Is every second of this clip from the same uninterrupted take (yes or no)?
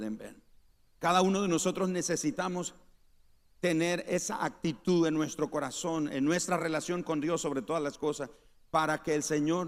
yes